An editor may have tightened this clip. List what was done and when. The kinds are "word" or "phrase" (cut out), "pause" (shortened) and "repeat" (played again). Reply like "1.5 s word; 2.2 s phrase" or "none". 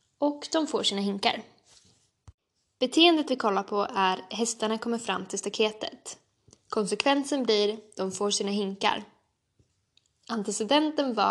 none